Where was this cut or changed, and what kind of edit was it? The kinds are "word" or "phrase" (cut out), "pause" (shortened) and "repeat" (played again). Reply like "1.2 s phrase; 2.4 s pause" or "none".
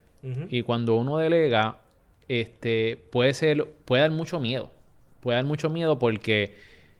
3.8 s pause